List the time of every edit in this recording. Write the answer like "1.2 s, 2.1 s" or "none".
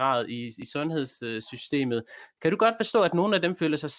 none